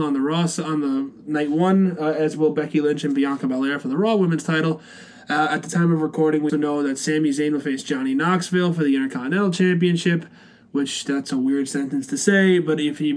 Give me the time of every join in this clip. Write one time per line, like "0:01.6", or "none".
0:06.5

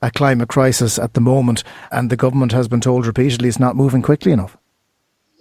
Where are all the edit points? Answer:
0:01.9

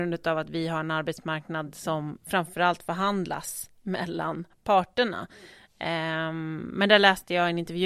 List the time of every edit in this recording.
none

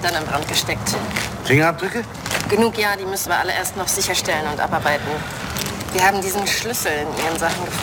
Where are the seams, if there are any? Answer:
0:03.3

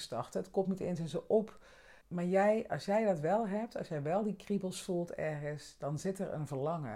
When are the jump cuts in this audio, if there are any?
0:02.0

